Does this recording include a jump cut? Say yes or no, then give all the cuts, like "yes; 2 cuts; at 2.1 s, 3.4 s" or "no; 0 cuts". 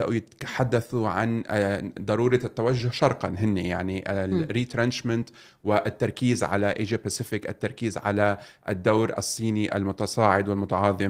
no; 0 cuts